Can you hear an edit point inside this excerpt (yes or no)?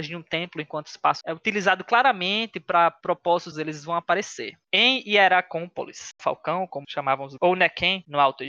yes